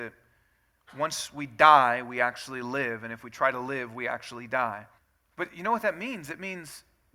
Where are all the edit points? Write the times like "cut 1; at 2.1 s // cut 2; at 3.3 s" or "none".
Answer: cut 1; at 5.0 s